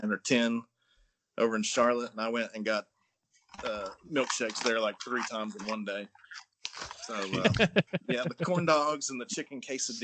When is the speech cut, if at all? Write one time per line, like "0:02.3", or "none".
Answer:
none